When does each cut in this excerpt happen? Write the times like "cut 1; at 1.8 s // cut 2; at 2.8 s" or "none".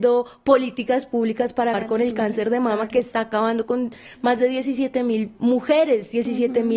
cut 1; at 1.7 s